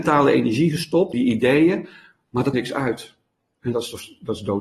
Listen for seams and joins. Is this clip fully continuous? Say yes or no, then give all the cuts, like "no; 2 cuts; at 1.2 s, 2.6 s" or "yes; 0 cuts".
no; 2 cuts; at 1.1 s, 2.5 s